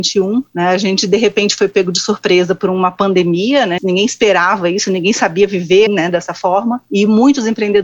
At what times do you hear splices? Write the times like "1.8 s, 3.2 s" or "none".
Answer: 3.8 s, 5.9 s